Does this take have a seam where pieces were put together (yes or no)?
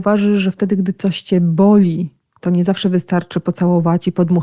no